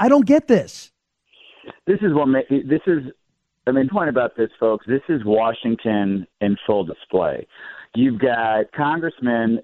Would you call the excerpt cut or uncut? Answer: cut